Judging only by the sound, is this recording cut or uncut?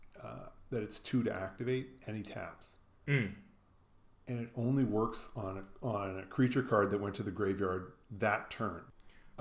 uncut